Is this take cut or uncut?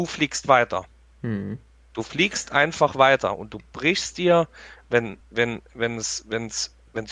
uncut